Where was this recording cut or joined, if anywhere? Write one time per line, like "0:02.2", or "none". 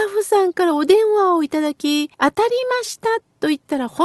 0:02.1